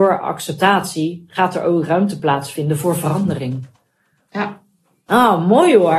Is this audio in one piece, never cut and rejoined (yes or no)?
yes